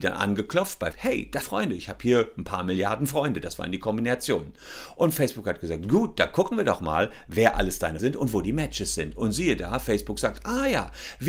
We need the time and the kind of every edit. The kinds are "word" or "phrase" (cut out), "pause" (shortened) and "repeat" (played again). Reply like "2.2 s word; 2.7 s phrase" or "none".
0.9 s phrase; 1.4 s phrase; 8.0 s word